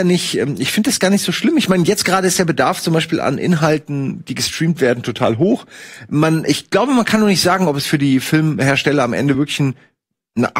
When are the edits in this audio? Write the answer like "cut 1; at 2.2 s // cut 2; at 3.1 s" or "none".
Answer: none